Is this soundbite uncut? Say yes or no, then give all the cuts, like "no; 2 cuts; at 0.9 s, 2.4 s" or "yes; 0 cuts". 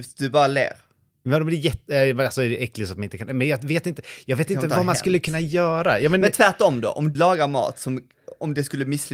no; 1 cut; at 7.1 s